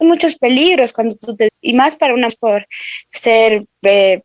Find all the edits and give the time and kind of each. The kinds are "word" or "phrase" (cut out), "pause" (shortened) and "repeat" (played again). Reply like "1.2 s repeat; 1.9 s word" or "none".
1.5 s word; 2.3 s phrase